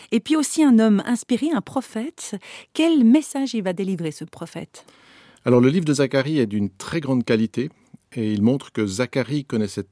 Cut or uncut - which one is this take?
uncut